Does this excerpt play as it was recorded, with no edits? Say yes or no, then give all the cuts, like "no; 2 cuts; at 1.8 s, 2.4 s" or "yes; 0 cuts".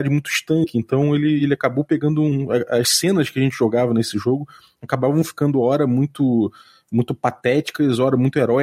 yes; 0 cuts